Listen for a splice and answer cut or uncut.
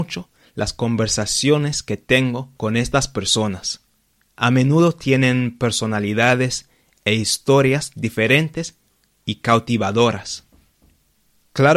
cut